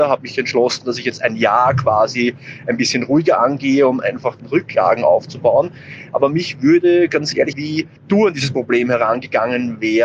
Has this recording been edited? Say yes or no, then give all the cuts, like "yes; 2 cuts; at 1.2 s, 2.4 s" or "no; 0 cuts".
yes; 3 cuts; at 4.4 s, 7.5 s, 8.0 s